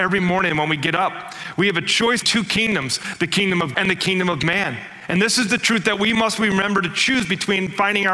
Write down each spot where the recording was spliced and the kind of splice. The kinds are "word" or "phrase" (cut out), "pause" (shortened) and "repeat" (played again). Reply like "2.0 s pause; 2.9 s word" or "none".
2.2 s word; 3.7 s word